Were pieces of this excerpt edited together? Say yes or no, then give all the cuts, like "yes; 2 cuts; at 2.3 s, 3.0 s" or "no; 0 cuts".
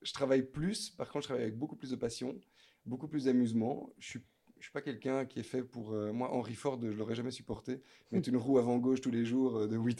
no; 0 cuts